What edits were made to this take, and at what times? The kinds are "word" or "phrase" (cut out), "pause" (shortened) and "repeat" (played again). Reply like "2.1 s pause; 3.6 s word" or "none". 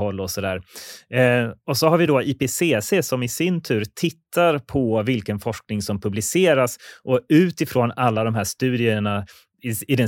none